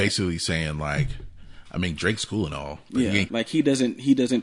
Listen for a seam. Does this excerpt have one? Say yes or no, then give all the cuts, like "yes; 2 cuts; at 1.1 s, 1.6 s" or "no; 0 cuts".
yes; 1 cut; at 3.3 s